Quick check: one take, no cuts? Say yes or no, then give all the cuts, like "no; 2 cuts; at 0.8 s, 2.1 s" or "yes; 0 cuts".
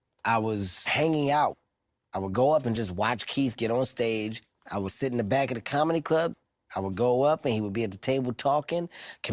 yes; 0 cuts